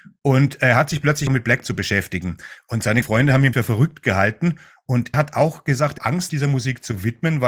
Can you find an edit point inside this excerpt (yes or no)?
yes